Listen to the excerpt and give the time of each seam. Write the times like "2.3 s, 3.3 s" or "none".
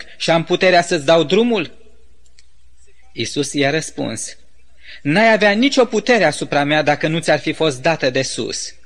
none